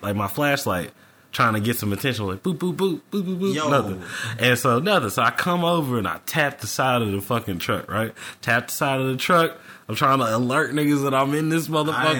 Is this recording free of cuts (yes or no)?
yes